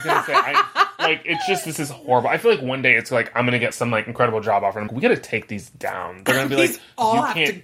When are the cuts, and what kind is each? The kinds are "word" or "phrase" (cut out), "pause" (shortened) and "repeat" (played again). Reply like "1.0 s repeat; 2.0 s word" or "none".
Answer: 3.7 s word; 4.9 s word